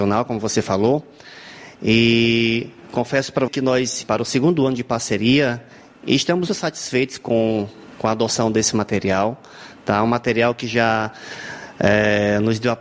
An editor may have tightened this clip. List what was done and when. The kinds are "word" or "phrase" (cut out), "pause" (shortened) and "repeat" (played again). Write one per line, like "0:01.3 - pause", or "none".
0:03.5 - word
0:04.0 - word
0:06.5 - word